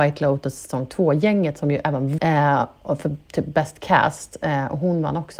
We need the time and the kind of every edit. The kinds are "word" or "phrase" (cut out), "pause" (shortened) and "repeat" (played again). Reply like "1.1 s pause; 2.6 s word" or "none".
2.2 s word